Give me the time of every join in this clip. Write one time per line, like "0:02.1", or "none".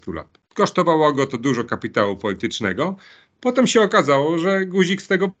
none